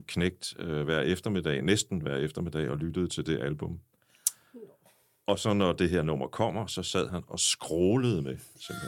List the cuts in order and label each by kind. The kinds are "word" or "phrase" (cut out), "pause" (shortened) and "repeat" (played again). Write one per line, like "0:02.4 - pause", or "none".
none